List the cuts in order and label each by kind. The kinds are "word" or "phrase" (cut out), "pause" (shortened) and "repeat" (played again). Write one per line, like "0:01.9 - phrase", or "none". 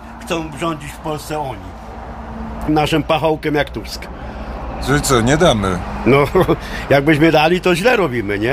0:02.7 - word